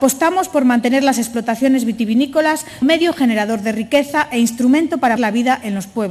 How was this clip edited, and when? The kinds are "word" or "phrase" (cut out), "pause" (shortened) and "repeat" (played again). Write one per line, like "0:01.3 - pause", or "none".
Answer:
0:02.8 - word
0:05.2 - word